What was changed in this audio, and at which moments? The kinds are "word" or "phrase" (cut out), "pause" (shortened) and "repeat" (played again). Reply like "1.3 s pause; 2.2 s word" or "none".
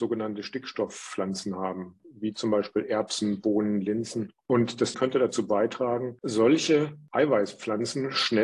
4.9 s phrase